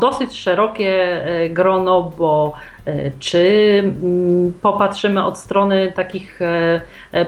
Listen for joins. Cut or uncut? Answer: uncut